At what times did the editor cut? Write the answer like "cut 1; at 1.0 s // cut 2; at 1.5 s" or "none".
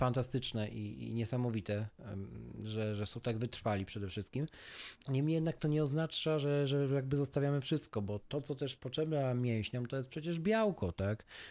cut 1; at 5.0 s